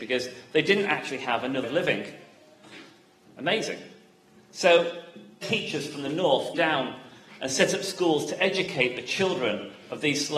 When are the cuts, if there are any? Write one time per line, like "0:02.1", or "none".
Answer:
0:01.6
0:05.4
0:06.5